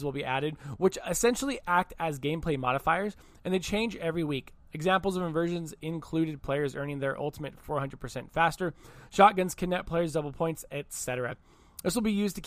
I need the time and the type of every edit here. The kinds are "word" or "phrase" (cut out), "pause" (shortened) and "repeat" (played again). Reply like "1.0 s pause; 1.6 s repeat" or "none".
none